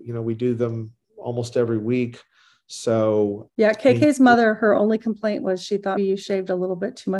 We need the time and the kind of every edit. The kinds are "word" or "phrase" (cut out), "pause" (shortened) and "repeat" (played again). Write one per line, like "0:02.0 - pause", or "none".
0:03.5 - word
0:06.0 - word